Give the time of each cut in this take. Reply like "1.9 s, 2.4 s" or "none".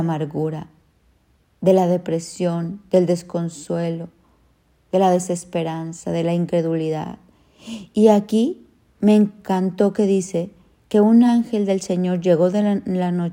none